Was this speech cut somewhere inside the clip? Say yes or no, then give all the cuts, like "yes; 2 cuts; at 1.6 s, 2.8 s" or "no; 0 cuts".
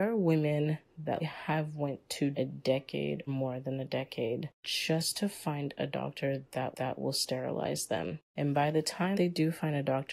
yes; 7 cuts; at 1.2 s, 2.3 s, 3.3 s, 4.5 s, 6.7 s, 8.3 s, 9.1 s